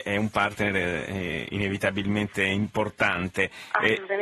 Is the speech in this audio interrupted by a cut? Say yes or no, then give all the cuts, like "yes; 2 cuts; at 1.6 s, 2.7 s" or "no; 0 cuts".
no; 0 cuts